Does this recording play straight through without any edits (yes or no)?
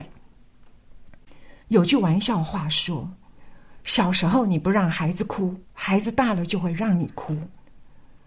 no